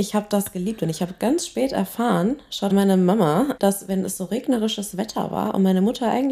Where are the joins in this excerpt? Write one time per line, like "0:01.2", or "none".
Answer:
0:02.7
0:03.6